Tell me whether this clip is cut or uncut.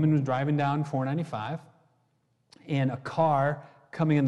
uncut